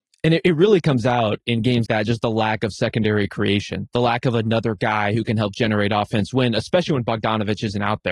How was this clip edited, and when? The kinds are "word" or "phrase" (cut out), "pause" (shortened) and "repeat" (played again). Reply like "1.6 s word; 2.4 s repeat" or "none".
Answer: 1.9 s word